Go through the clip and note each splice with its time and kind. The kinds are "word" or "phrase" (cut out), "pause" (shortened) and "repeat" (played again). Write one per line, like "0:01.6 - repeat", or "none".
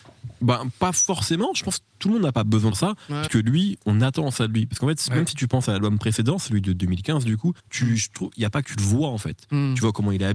0:02.7 - phrase
0:03.3 - word
0:07.6 - pause
0:08.6 - phrase